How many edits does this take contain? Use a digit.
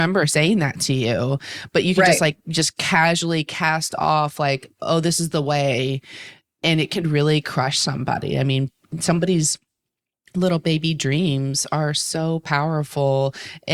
0